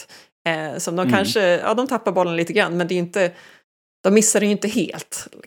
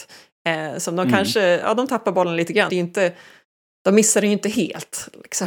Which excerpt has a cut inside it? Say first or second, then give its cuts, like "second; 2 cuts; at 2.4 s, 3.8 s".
second; 1 cut; at 2.7 s